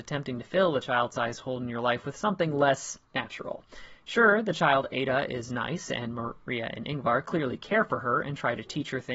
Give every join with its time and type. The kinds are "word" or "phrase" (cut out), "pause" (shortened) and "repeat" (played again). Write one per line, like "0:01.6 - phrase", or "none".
0:03.1 - pause